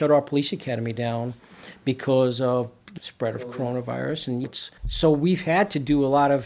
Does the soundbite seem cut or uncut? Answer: cut